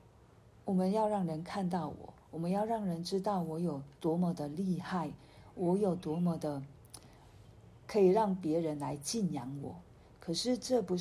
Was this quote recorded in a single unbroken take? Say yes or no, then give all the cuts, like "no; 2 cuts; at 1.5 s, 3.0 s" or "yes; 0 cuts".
no; 1 cut; at 4.0 s